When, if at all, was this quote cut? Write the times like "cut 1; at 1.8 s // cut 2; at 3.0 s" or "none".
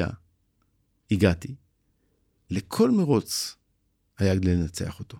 none